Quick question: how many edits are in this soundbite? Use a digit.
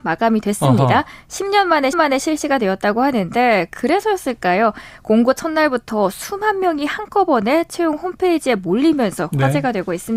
1